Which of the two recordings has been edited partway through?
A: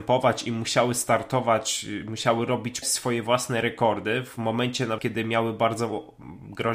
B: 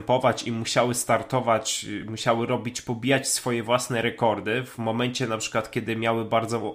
A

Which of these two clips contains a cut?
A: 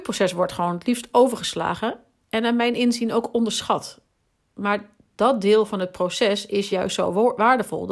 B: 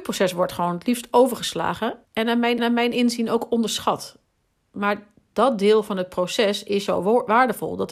B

